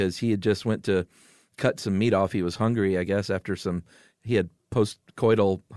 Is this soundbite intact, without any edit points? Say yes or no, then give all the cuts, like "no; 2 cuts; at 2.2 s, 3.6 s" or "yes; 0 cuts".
yes; 0 cuts